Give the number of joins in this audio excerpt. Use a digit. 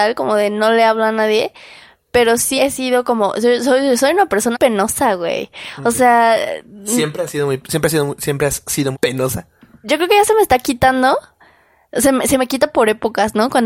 3